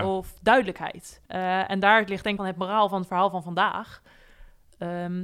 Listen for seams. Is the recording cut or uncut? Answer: cut